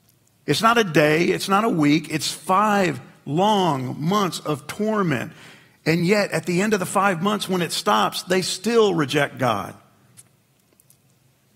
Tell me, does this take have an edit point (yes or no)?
no